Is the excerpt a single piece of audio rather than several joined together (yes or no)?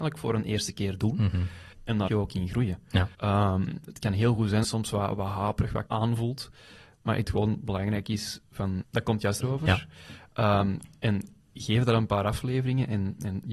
no